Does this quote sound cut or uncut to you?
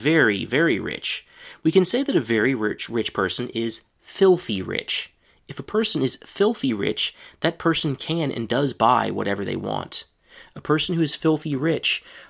uncut